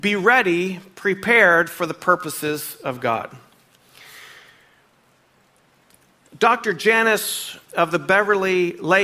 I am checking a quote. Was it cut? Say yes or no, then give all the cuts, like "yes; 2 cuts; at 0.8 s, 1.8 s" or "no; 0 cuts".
yes; 1 cut; at 7.6 s